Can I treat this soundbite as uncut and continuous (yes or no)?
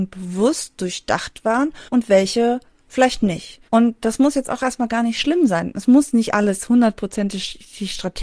no